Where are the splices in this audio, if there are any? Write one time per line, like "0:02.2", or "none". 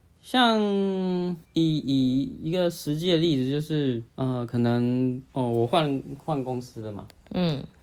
0:01.4
0:04.1
0:05.3